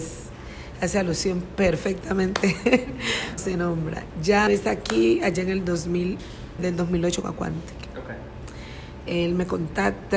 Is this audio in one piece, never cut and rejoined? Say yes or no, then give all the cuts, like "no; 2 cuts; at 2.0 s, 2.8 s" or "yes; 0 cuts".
no; 4 cuts; at 3.4 s, 4.5 s, 6.6 s, 7.2 s